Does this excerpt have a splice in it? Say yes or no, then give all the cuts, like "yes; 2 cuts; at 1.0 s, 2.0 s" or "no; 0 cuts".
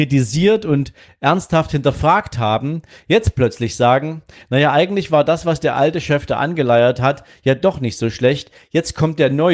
no; 0 cuts